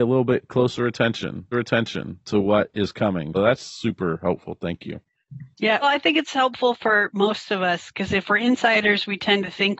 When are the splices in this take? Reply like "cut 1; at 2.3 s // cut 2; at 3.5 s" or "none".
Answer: cut 1; at 1.5 s // cut 2; at 3.3 s // cut 3; at 5.8 s

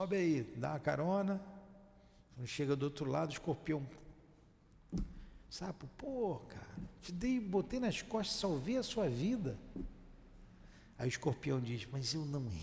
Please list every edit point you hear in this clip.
none

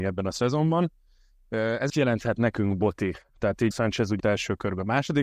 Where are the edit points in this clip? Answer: cut 1; at 1.9 s // cut 2; at 3.7 s // cut 3; at 4.2 s

